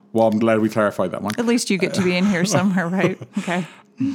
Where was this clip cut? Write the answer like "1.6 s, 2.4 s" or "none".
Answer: none